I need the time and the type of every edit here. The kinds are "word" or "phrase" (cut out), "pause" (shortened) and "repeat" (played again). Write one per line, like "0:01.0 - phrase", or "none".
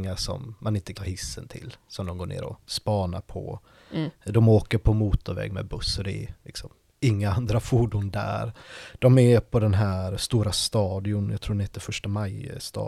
0:00.9 - word